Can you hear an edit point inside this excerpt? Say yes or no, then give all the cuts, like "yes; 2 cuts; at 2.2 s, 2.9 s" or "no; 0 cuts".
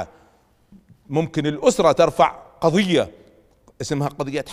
no; 0 cuts